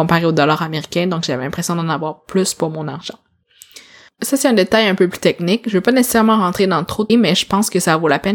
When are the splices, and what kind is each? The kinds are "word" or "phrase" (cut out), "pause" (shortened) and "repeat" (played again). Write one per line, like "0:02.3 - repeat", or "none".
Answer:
0:07.1 - word